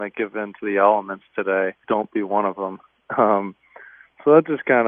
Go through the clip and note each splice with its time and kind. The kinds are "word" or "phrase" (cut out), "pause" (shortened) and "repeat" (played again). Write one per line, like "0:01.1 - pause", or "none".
0:01.8 - word